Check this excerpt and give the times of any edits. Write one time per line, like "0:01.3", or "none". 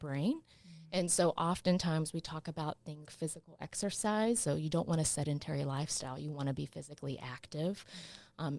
0:03.1